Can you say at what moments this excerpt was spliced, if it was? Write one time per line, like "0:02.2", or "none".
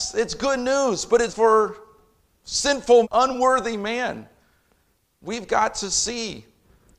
0:01.3
0:03.0